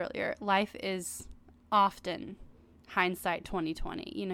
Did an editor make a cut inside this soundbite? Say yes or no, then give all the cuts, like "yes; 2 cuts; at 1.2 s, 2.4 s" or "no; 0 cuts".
no; 0 cuts